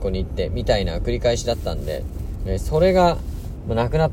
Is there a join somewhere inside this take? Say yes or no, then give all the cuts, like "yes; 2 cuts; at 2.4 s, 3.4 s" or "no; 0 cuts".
no; 0 cuts